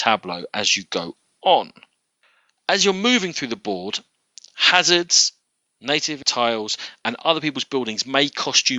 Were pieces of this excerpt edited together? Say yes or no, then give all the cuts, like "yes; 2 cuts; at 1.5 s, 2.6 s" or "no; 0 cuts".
no; 0 cuts